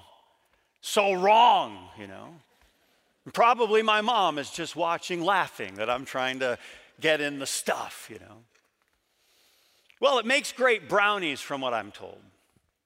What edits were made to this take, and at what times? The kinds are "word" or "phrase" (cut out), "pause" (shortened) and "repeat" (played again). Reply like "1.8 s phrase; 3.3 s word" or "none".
none

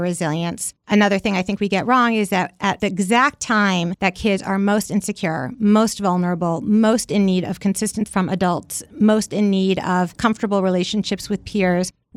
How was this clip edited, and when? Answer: 8.1 s word

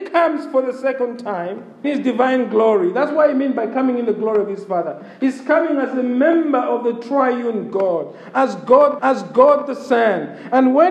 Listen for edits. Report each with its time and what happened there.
1.8 s phrase; 9.0 s repeat

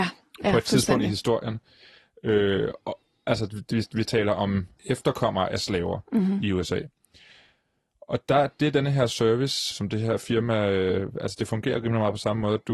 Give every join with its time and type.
9.7 s word

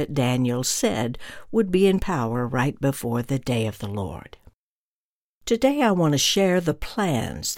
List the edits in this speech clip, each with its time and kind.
none

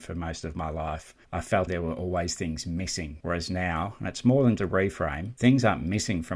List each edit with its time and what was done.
1.7 s phrase; 4.6 s word

